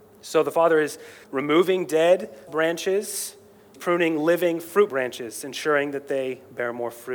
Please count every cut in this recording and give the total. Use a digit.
4